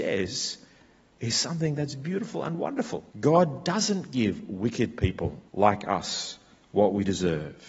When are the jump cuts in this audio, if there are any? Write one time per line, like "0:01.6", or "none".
0:03.1
0:05.5